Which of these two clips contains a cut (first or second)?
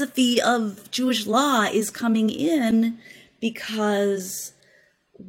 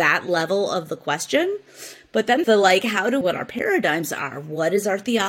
second